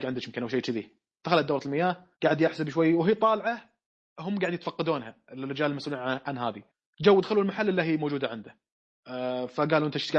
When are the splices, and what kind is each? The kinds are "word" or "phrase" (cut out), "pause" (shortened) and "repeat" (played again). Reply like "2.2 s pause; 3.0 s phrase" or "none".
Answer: 2.1 s pause

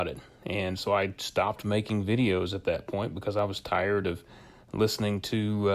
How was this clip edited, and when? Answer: none

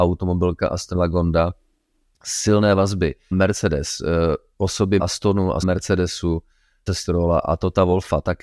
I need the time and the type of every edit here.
0.9 s word; 3.3 s word; 5.0 s word; 5.6 s word; 6.9 s word

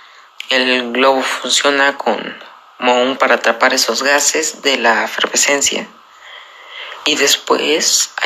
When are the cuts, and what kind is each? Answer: 3.2 s word

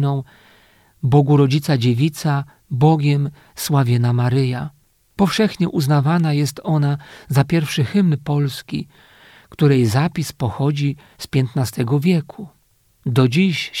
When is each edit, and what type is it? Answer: 5.0 s pause

